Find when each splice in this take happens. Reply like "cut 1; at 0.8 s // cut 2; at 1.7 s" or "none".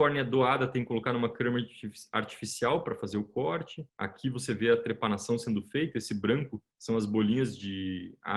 cut 1; at 3.9 s // cut 2; at 6.7 s